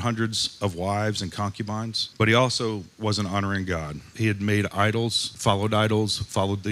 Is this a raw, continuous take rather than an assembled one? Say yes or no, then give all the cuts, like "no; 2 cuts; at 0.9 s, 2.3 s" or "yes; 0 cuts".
yes; 0 cuts